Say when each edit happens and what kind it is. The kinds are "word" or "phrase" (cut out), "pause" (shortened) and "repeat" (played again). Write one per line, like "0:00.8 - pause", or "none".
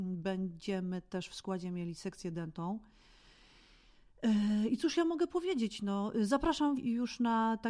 0:06.8 - word